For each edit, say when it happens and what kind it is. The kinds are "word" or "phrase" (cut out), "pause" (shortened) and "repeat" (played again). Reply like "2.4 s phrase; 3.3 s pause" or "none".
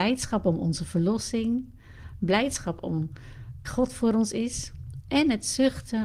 3.6 s word